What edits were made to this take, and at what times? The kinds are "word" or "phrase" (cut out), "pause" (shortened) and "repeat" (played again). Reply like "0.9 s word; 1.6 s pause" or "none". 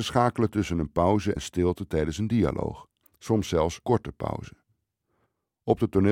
1.4 s word; 3.0 s pause; 3.8 s phrase